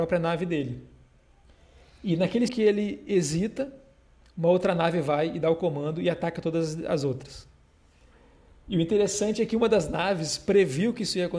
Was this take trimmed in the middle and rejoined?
yes; 1 cut; at 2.5 s

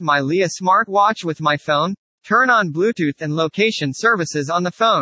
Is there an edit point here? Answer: no; 0 cuts

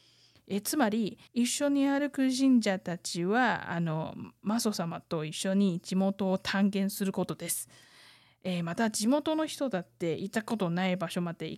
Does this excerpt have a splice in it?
yes; 1 cut; at 1.3 s

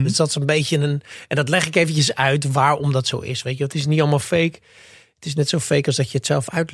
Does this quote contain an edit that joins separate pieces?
no; 0 cuts

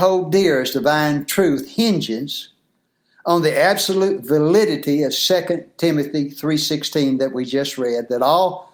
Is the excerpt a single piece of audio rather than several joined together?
yes; 0 cuts

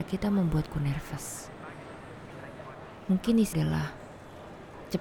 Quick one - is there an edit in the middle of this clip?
yes; 1 cut; at 3.5 s

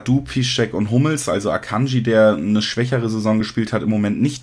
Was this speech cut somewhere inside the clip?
no; 0 cuts

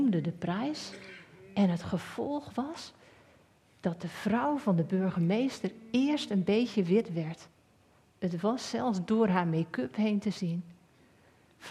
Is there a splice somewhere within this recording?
no; 0 cuts

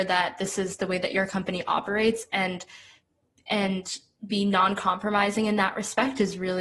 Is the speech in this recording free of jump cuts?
yes; 0 cuts

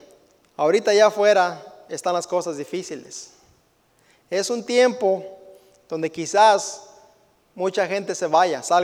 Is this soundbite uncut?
yes; 0 cuts

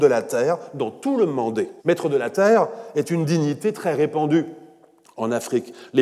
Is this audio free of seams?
no; 1 cut; at 1.8 s

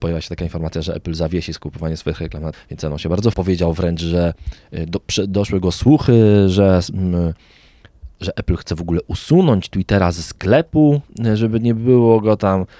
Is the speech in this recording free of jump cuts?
no; 2 cuts; at 2.5 s, 3.3 s

